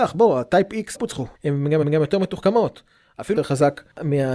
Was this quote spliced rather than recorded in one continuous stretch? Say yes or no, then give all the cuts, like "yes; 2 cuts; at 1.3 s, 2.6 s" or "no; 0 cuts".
yes; 4 cuts; at 0.9 s, 1.3 s, 1.8 s, 3.4 s